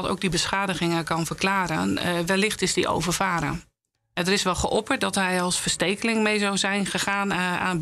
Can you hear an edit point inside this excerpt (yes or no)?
yes